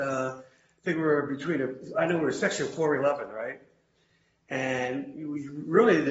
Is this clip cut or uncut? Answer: uncut